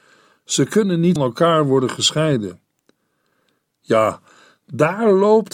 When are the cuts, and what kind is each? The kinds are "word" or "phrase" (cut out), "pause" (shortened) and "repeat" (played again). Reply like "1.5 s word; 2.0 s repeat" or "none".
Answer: 1.2 s word